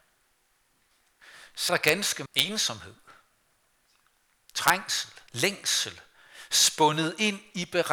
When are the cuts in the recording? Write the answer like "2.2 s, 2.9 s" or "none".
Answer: 1.7 s, 2.3 s, 5.3 s